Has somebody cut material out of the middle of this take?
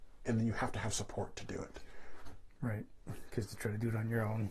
no; 0 cuts

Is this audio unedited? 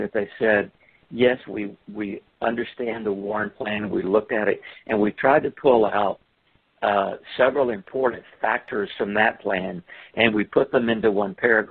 yes; 0 cuts

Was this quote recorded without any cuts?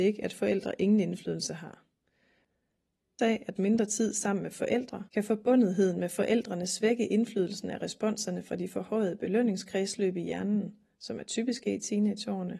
no; 3 cuts; at 3.2 s, 3.6 s, 5.1 s

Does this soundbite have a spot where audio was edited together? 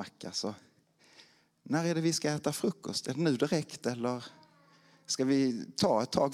no; 0 cuts

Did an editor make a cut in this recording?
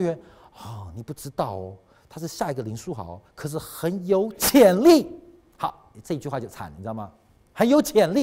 yes; 1 cut; at 3.3 s

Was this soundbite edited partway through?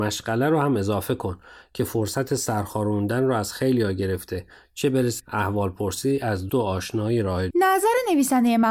yes; 3 cuts; at 5.2 s, 6.5 s, 7.5 s

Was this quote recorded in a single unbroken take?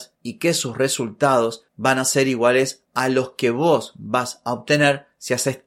yes; 0 cuts

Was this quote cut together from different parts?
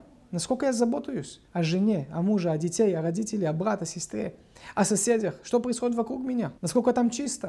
yes; 2 cuts; at 1.5 s, 6.6 s

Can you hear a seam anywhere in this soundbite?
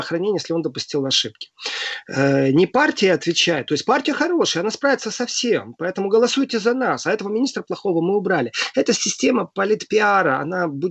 no; 0 cuts

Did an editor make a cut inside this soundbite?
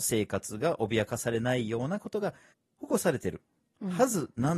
no; 0 cuts

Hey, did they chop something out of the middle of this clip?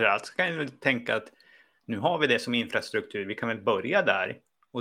no; 0 cuts

